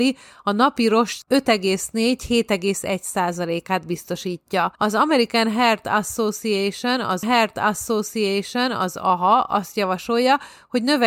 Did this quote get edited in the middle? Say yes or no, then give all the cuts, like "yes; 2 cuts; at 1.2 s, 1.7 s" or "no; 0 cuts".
yes; 3 cuts; at 1.2 s, 4.8 s, 7.2 s